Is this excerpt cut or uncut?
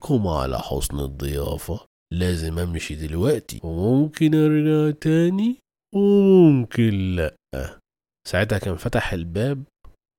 uncut